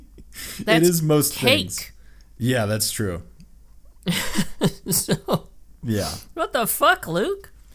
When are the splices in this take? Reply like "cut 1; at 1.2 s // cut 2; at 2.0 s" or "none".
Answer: none